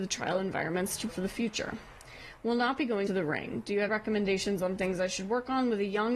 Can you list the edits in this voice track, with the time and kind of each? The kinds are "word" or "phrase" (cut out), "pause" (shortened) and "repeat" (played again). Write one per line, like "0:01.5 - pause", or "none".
0:01.1 - word
0:03.1 - word
0:03.9 - word